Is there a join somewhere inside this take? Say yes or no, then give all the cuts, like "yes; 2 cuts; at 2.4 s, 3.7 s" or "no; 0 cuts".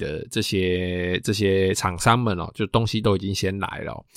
no; 0 cuts